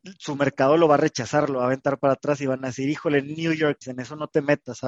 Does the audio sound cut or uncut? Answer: cut